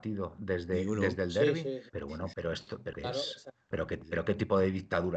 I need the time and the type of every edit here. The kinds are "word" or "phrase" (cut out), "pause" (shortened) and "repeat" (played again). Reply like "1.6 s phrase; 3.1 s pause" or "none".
1.9 s word; 2.3 s word; 2.9 s word; 3.7 s word